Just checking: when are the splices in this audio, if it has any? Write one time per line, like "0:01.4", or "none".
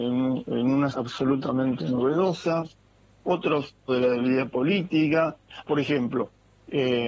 0:00.9
0:03.9
0:05.6